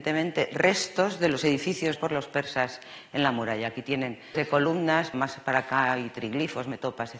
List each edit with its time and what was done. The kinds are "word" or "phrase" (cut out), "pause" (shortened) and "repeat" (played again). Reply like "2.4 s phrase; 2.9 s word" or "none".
2.0 s word; 4.3 s word; 5.1 s word